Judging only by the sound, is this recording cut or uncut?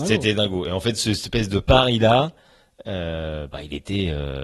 uncut